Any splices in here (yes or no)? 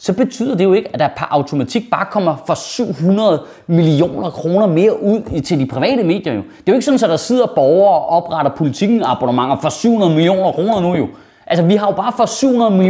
no